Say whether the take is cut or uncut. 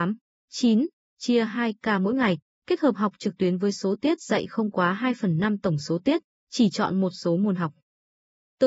uncut